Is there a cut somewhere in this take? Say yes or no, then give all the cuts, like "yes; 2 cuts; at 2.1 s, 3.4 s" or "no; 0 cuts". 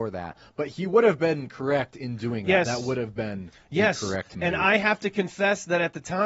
no; 0 cuts